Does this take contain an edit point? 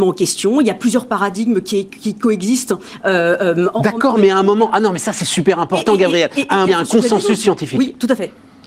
yes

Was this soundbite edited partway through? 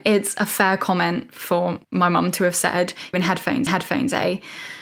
yes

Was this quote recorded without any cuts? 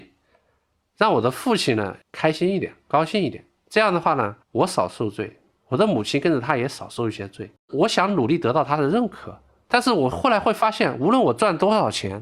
no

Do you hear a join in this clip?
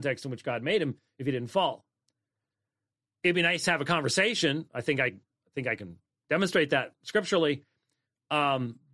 no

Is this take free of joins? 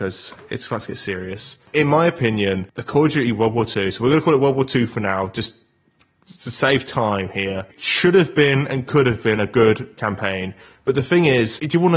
yes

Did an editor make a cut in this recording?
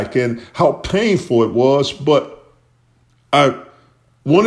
no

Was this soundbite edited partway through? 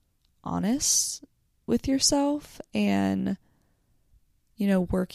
no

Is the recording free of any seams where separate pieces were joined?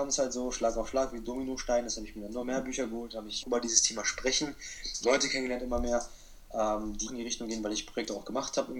no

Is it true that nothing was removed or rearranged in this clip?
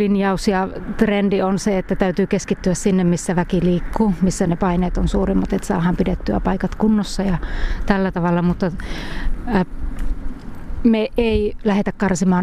yes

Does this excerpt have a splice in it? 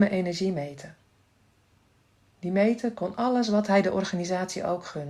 no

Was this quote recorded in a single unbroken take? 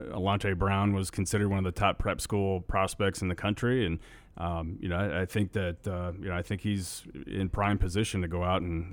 yes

